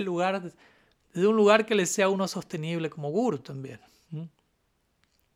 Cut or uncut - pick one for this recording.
uncut